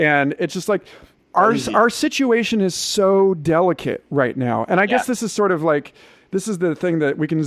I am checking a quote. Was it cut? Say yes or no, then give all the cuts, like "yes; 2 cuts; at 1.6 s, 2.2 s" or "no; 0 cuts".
no; 0 cuts